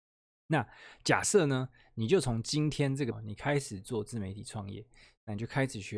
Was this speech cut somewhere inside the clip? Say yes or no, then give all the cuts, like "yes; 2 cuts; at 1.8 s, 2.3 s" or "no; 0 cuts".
yes; 1 cut; at 3.1 s